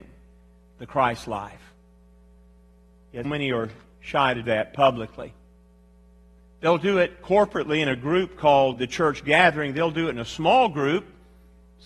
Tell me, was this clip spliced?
yes; 3 cuts; at 3.2 s, 4.4 s, 8.8 s

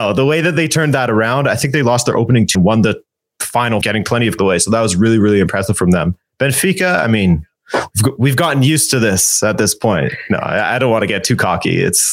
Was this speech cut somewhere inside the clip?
yes; 3 cuts; at 2.5 s, 3.8 s, 4.4 s

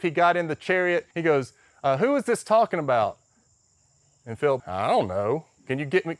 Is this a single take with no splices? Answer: no; 2 cuts; at 1.1 s, 4.6 s

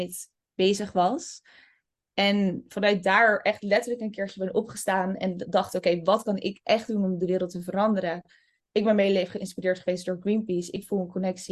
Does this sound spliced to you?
no; 0 cuts

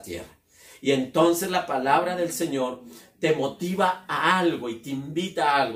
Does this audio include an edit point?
no; 0 cuts

